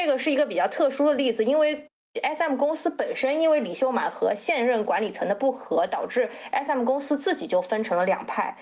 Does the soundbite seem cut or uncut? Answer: uncut